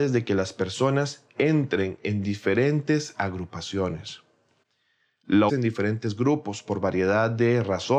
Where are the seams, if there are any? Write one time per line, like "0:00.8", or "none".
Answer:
0:05.5